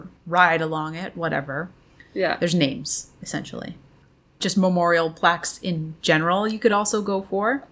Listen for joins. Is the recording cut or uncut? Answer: uncut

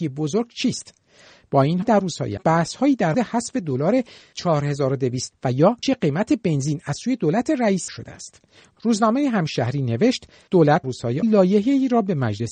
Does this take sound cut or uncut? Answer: cut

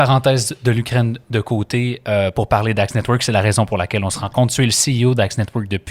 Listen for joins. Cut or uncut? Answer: uncut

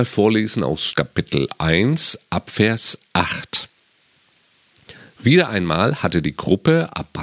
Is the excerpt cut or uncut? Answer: cut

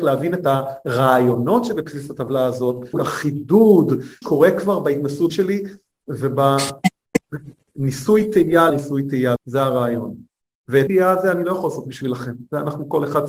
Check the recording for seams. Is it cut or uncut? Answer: cut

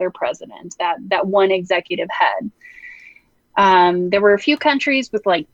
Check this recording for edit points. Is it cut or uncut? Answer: uncut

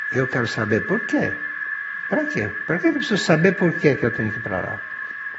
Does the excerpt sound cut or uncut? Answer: uncut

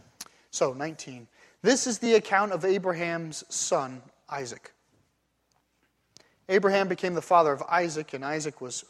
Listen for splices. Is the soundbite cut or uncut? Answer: uncut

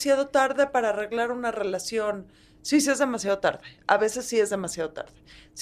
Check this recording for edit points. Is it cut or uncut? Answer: uncut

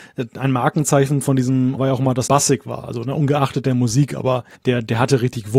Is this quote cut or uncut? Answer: cut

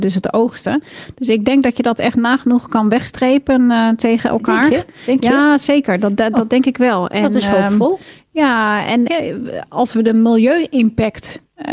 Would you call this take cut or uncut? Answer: cut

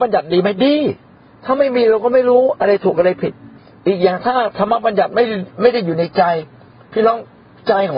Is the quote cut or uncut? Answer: cut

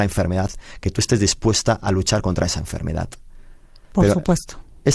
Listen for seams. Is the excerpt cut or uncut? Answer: uncut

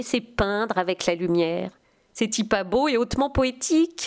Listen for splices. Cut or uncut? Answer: uncut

